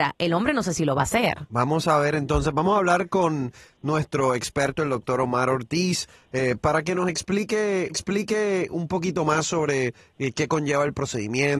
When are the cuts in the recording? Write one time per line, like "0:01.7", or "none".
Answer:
0:07.9